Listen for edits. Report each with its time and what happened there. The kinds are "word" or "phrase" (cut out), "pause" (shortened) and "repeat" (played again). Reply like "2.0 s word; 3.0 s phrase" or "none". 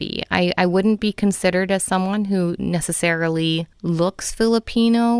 3.7 s pause